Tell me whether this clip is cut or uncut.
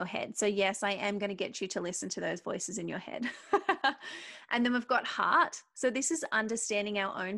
uncut